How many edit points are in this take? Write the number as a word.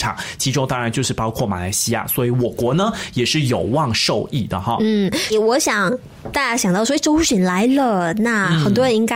one